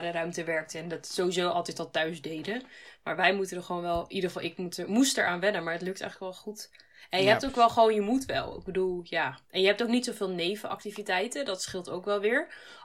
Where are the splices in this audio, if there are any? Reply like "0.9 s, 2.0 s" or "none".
9.4 s